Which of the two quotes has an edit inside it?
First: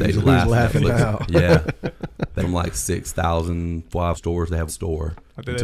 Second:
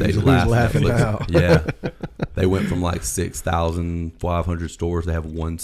first; 3 cuts; at 2.4 s, 4.1 s, 4.7 s

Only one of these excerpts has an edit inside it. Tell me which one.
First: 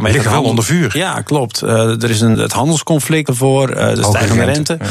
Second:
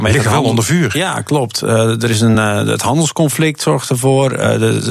first; 3 cuts; at 2.3 s, 3.3 s, 4.0 s

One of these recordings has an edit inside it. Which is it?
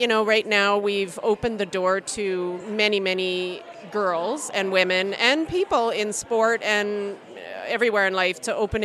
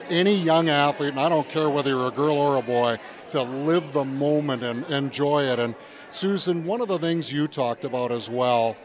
second; 1 cut; at 4.9 s

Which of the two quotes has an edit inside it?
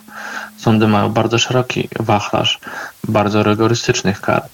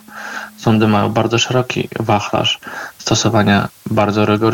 first; 1 cut; at 2.9 s

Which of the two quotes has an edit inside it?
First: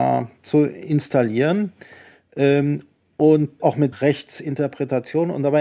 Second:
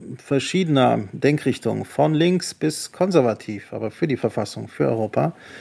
first; 2 cuts; at 3.6 s, 3.9 s

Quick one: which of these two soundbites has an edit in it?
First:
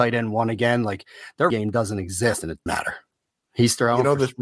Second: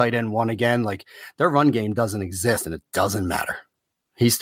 first; 2 cuts; at 1.5 s, 2.7 s

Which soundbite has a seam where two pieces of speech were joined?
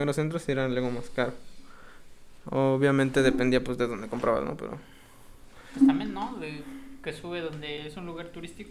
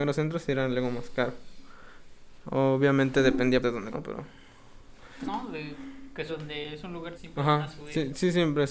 second; 5 cuts; at 3.6 s, 3.9 s, 5.2 s, 6.3 s, 7.1 s

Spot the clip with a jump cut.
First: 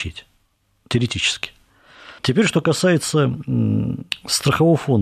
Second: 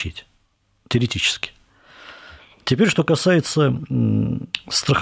first; 1 cut; at 2.2 s

